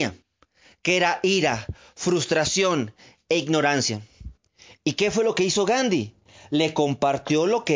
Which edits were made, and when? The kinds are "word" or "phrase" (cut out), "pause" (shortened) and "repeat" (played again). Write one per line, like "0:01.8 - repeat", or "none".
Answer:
none